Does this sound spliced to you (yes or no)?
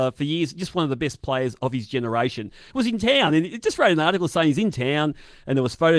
no